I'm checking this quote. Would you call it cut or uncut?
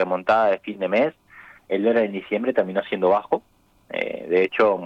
uncut